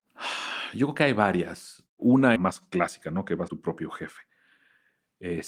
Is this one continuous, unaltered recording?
no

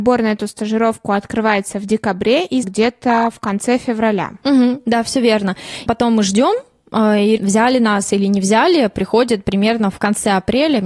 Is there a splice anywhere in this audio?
yes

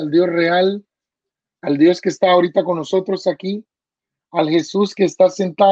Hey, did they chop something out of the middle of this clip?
no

